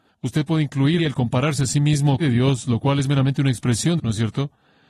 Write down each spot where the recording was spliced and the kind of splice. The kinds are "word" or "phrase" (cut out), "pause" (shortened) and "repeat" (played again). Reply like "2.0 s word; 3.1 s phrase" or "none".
1.0 s word; 2.2 s phrase; 4.0 s phrase

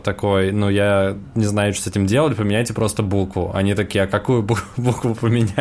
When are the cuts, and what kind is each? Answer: none

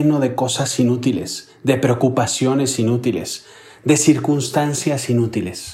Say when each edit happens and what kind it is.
none

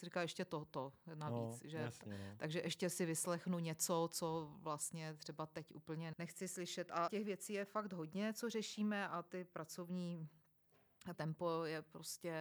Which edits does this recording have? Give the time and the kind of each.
6.1 s word; 7.1 s word; 11.1 s word

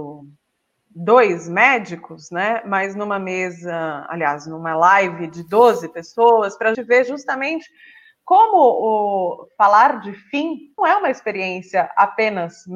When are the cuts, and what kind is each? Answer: 6.7 s word; 10.8 s word

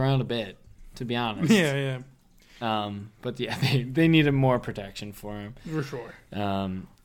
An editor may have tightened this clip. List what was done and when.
none

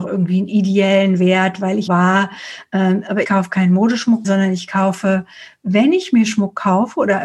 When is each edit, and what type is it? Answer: 1.9 s word; 3.2 s word; 4.2 s word

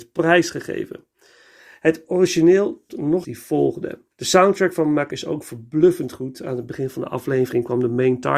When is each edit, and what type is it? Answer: 2.9 s word; 3.2 s phrase; 4.1 s pause; 5.1 s word

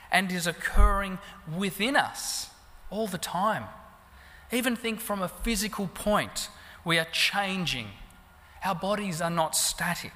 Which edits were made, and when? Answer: none

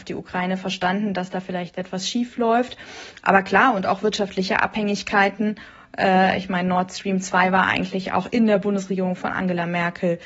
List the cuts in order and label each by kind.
none

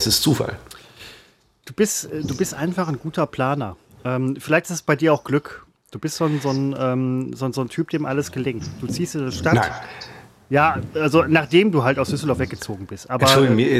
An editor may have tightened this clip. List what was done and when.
none

